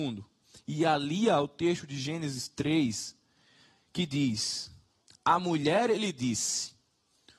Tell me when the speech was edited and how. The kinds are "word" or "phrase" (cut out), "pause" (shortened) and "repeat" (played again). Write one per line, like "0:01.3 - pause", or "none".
none